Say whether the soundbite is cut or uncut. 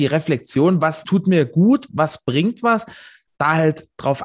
cut